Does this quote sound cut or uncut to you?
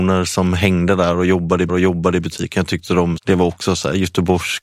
cut